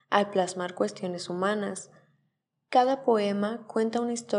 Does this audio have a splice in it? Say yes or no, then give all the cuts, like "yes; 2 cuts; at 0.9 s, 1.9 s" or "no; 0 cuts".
no; 0 cuts